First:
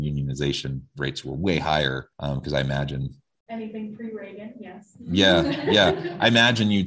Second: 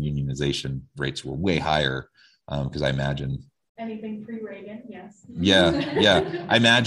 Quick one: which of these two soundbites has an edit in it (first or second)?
first